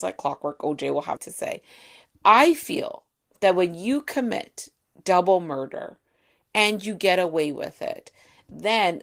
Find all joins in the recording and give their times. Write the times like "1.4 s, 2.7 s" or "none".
1.2 s